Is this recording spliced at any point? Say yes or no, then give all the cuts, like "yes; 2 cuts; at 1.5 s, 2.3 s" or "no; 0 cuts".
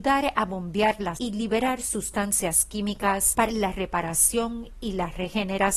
yes; 2 cuts; at 1.1 s, 3.5 s